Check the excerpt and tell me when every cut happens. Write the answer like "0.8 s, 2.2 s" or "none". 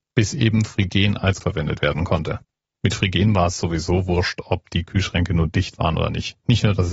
1.4 s